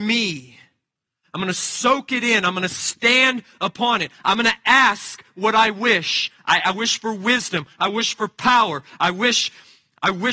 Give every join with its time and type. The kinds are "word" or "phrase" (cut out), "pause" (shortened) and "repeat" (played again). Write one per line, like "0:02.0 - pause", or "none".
none